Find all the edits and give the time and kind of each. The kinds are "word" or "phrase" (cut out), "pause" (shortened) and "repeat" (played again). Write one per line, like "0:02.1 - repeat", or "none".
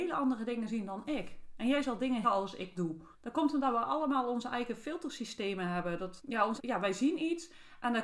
0:02.2 - phrase
0:02.7 - word
0:03.1 - pause
0:06.2 - word
0:06.6 - word